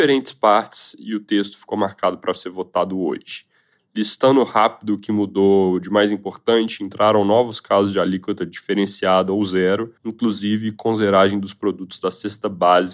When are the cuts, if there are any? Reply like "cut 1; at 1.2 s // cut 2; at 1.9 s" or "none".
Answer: cut 1; at 10.0 s

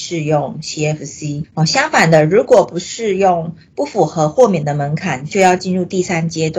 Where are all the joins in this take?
cut 1; at 1.4 s

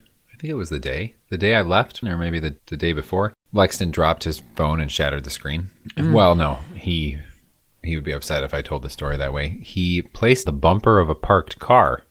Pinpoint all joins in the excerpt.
cut 1; at 1.2 s // cut 2; at 2.0 s // cut 3; at 2.6 s // cut 4; at 10.5 s

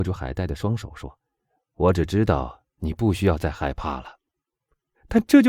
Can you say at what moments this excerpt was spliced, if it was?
cut 1; at 1.2 s // cut 2; at 4.3 s

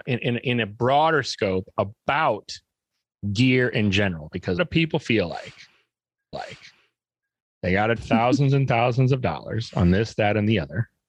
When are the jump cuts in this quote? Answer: cut 1; at 4.6 s // cut 2; at 6.3 s // cut 3; at 8.0 s

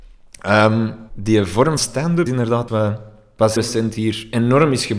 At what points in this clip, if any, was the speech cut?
cut 1; at 1.1 s // cut 2; at 1.8 s // cut 3; at 2.3 s // cut 4; at 2.7 s // cut 5; at 3.6 s

